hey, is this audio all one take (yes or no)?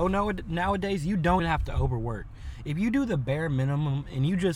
no